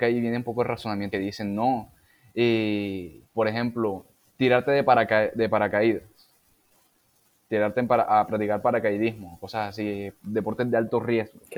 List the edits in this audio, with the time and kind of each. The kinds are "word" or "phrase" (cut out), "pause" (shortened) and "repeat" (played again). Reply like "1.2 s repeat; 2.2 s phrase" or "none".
1.1 s phrase; 3.3 s pause; 4.1 s pause